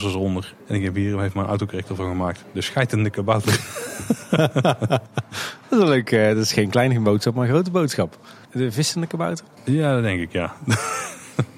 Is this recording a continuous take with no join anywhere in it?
no; 2 cuts; at 8.4 s, 9.5 s

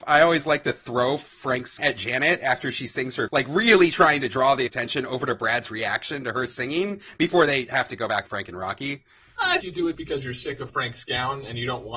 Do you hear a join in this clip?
yes; 7 cuts; at 1.8 s, 3.3 s, 4.7 s, 8.3 s, 9.6 s, 9.9 s, 10.7 s

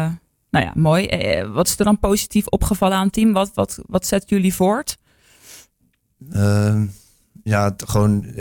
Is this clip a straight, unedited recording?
yes; 0 cuts

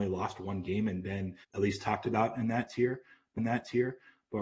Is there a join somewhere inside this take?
yes; 2 cuts; at 1.4 s, 3.4 s

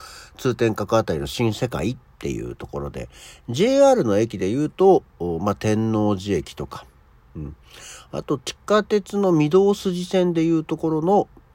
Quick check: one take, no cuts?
yes; 0 cuts

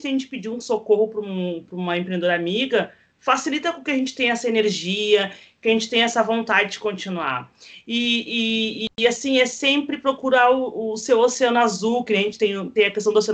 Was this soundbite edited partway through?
no; 0 cuts

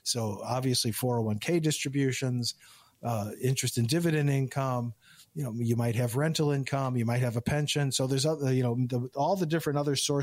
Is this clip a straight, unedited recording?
yes; 0 cuts

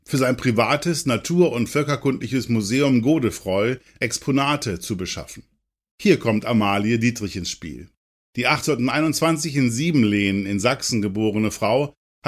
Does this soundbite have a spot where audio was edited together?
no; 0 cuts

